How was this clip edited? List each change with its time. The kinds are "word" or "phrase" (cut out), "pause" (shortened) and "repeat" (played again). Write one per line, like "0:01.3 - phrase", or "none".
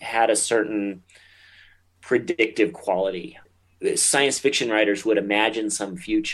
none